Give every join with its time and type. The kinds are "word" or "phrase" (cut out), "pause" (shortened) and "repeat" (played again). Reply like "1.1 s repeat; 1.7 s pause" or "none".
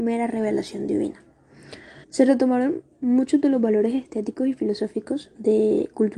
2.0 s pause